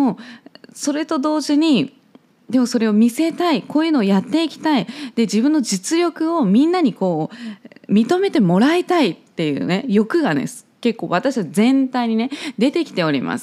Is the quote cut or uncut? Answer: uncut